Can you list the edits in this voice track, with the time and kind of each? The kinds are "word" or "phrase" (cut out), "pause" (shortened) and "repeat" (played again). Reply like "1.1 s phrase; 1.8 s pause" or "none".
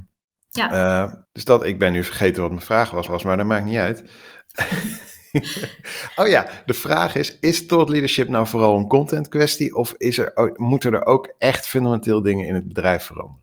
1.3 s pause; 3.1 s repeat